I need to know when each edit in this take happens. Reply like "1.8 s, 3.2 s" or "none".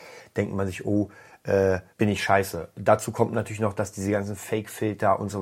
1.9 s